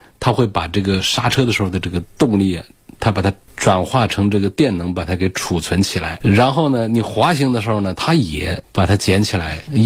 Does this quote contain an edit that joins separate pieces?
no; 0 cuts

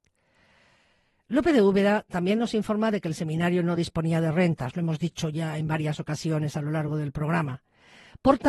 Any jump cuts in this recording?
no; 0 cuts

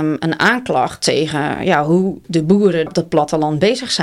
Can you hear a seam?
yes; 1 cut; at 2.9 s

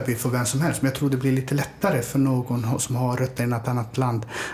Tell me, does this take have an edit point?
no; 0 cuts

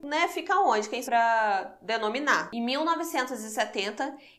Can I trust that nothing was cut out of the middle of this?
no; 1 cut; at 1.0 s

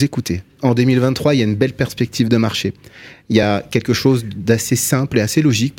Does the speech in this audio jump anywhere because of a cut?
no; 0 cuts

